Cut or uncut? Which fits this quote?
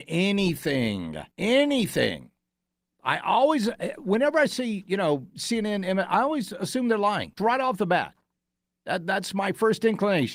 cut